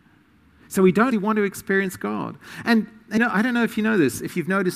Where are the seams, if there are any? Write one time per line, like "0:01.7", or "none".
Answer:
0:01.1
0:03.2